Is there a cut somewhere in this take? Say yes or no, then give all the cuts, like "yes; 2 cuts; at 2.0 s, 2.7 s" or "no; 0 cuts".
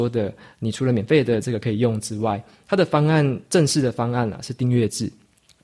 no; 0 cuts